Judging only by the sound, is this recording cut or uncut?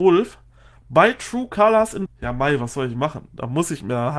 cut